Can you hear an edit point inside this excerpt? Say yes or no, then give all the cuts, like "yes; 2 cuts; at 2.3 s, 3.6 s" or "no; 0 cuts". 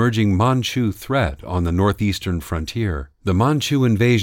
yes; 1 cut; at 3.2 s